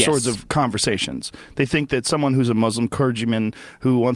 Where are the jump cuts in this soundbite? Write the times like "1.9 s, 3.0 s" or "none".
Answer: none